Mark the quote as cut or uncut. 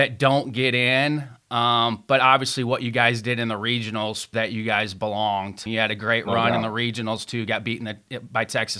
cut